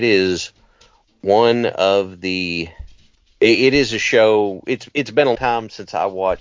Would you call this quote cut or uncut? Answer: cut